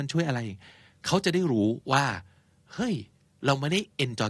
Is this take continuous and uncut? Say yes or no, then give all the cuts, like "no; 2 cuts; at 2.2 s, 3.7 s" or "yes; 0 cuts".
yes; 0 cuts